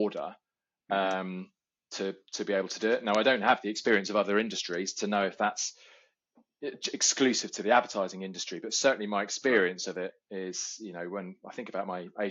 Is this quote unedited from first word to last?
yes; 0 cuts

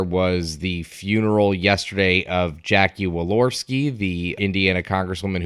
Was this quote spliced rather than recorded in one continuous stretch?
yes; 1 cut; at 4.4 s

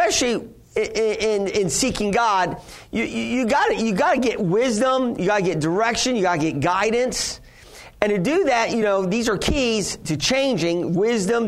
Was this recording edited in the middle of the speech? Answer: no; 0 cuts

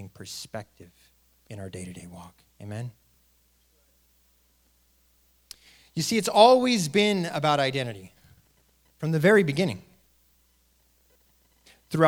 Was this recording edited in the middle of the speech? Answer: no; 0 cuts

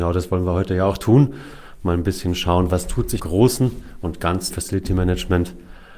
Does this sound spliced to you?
yes; 2 cuts; at 3.2 s, 4.5 s

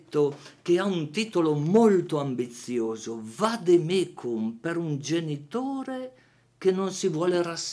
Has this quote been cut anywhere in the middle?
no; 0 cuts

